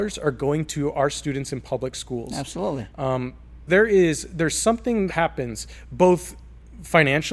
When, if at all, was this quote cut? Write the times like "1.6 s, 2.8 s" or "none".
3.7 s, 5.1 s